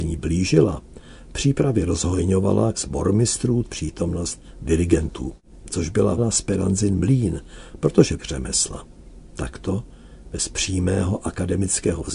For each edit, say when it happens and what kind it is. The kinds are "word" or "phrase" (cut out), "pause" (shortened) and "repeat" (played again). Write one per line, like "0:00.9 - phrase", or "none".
0:02.7 - word
0:03.6 - word
0:06.2 - word
0:08.2 - phrase

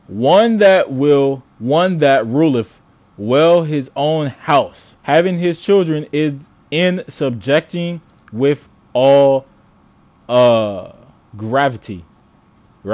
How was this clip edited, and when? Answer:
0:01.5 - pause
0:05.0 - pause

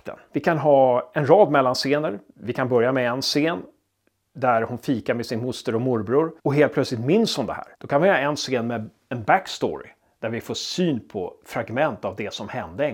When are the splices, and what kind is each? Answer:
0:06.4 - pause
0:07.7 - pause

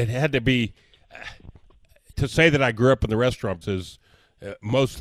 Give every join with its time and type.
0:02.1 - phrase
0:03.6 - word

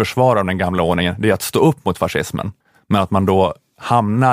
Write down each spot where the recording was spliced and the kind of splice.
0:02.6 - pause

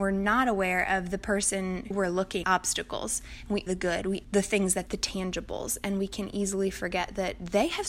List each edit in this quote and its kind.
0:01.9 - word
0:02.4 - word
0:03.7 - phrase
0:04.2 - phrase
0:04.9 - phrase

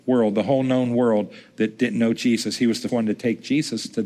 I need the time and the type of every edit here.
0:02.9 - word

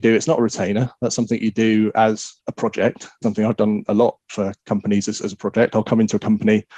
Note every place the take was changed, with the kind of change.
0:02.4 - pause
0:03.2 - phrase

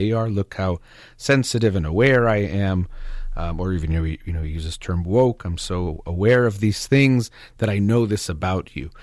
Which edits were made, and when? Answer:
none

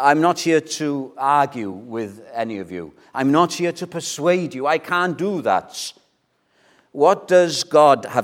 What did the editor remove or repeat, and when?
none

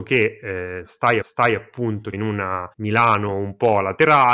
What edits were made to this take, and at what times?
0:01.2 - repeat
0:02.1 - phrase
0:02.7 - pause

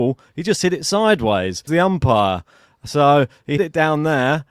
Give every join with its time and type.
0:01.7 - word
0:03.6 - word

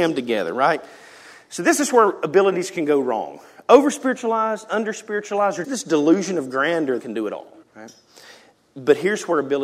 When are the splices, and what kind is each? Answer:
0:05.6 - word
0:07.0 - phrase
0:07.6 - pause

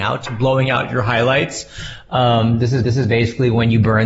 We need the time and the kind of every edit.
0:02.8 - repeat

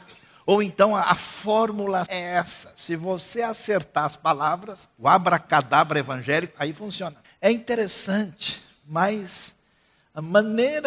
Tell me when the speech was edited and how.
0:02.1 - word
0:04.9 - pause
0:07.2 - pause

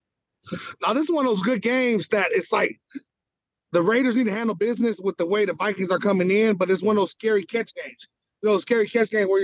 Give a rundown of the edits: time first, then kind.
none

